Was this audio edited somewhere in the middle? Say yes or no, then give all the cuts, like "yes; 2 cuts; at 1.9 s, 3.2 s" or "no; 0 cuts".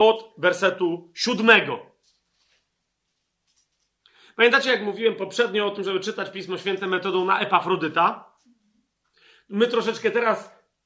no; 0 cuts